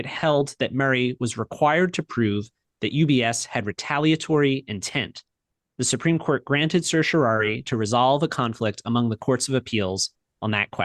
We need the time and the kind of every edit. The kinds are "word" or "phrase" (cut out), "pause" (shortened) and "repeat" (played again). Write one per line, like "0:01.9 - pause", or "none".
none